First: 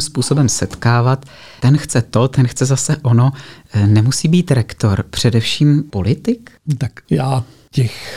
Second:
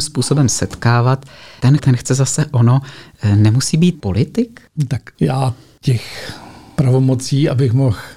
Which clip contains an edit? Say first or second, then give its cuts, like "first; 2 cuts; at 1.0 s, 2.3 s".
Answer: second; 2 cuts; at 1.8 s, 3.9 s